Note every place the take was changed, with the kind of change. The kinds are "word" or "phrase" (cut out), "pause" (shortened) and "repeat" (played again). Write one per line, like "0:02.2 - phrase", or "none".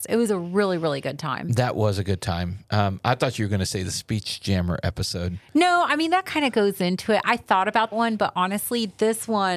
0:02.6 - pause
0:07.9 - word